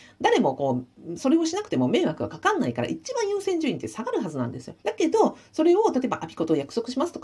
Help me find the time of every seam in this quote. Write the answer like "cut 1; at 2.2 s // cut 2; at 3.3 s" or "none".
cut 1; at 4.8 s